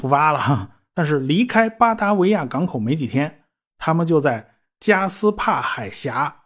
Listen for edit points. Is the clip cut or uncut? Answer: uncut